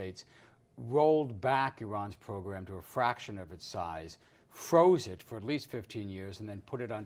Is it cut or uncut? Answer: uncut